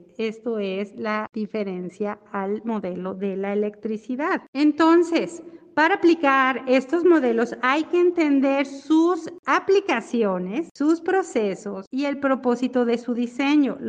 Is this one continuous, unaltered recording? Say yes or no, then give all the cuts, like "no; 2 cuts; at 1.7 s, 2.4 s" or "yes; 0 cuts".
yes; 0 cuts